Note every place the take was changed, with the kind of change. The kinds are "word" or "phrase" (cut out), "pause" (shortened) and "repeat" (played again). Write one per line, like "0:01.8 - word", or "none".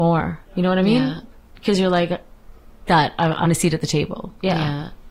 0:02.9 - word
0:03.4 - word